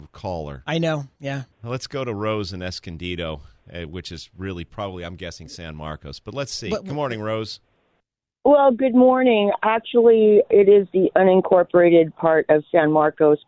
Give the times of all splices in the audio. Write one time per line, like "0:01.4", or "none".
0:01.5